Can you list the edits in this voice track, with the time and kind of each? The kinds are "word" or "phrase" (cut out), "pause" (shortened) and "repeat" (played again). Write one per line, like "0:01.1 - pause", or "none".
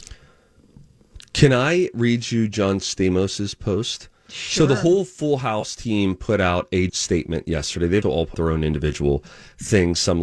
0:06.9 - word
0:08.0 - word
0:08.3 - word